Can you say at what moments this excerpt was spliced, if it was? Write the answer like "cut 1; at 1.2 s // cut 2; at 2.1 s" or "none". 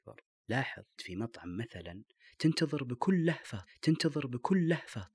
cut 1; at 1.0 s // cut 2; at 3.7 s

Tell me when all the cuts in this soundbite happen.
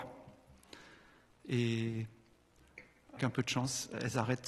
cut 1; at 3.2 s

